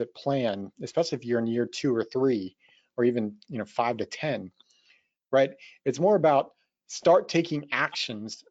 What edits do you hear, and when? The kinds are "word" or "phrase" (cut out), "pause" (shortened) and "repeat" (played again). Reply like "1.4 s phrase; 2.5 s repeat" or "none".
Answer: none